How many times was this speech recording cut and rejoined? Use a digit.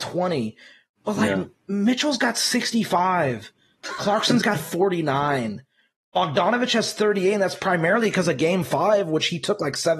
0